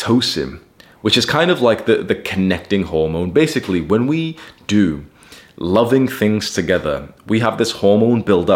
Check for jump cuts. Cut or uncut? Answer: uncut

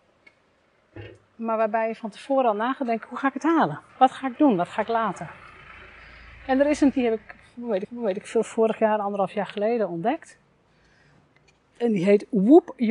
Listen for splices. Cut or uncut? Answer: cut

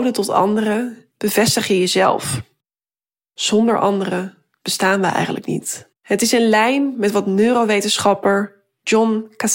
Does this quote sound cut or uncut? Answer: cut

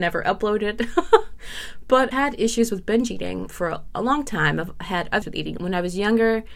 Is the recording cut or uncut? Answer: cut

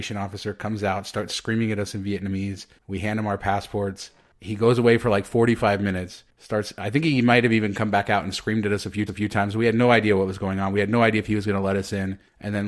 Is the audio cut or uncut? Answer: cut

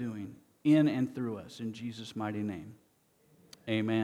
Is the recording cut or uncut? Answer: uncut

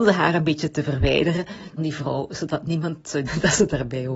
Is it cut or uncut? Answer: cut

